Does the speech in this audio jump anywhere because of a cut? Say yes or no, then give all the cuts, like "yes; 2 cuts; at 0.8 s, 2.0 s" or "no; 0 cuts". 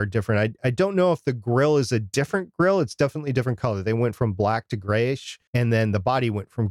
yes; 1 cut; at 5.5 s